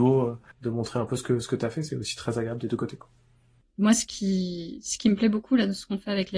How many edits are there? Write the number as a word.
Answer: zero